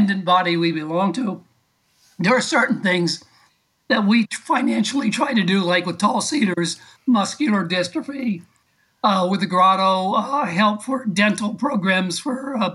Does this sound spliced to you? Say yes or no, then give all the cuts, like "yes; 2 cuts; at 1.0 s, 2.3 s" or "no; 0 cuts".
no; 0 cuts